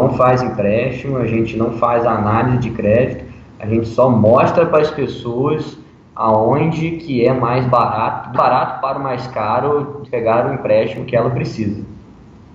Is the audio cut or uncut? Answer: cut